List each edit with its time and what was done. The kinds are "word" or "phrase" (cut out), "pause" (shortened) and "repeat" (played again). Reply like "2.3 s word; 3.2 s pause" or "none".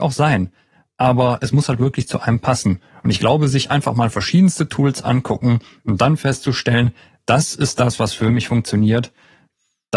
none